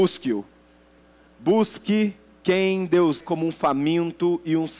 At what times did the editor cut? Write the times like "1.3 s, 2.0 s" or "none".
3.2 s

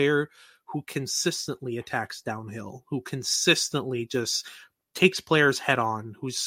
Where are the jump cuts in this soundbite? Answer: none

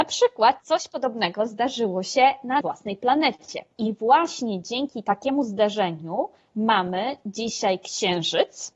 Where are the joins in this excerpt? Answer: 2.6 s

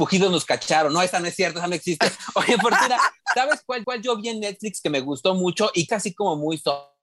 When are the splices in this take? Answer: 3.8 s, 5.9 s

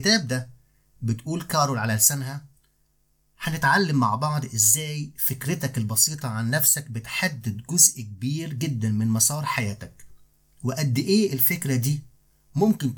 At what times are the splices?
none

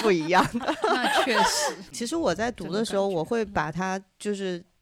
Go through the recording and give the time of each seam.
1.9 s

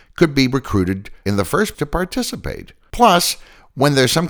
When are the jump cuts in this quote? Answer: 1.7 s

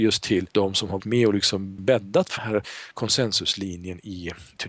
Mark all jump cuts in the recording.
1.0 s, 1.8 s, 2.4 s

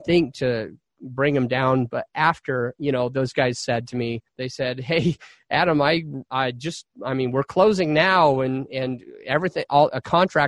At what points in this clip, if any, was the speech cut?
4.3 s, 6.3 s

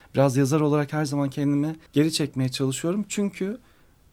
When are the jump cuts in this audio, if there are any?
1.9 s

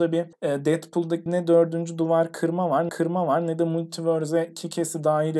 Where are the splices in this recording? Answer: 1.3 s, 2.9 s

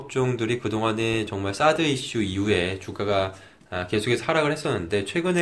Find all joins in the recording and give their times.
none

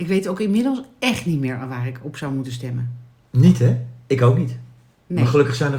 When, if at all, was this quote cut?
none

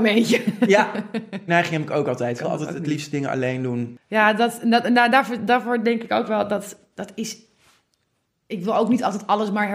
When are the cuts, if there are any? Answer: 1.5 s

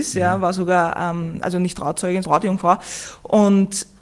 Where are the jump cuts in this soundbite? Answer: 1.4 s, 2.2 s

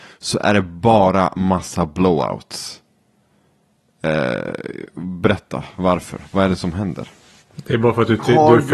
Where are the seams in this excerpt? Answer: none

